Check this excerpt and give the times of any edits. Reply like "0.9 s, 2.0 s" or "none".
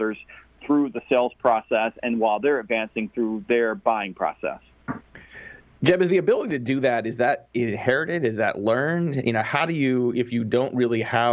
none